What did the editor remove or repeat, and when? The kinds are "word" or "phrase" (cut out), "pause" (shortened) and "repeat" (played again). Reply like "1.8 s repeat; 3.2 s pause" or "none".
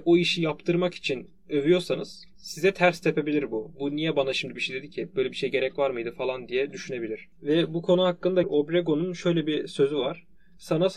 2.3 s pause; 4.6 s word; 8.4 s word